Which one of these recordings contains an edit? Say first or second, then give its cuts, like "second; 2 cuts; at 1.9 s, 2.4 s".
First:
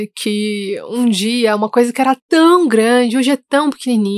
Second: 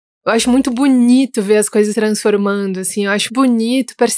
second; 2 cuts; at 1.9 s, 3.3 s